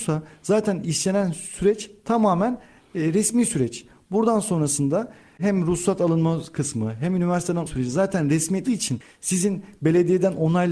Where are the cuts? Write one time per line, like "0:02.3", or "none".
0:07.7
0:08.6